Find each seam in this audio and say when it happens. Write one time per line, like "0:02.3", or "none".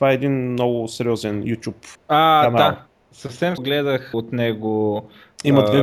0:01.9
0:03.6
0:04.1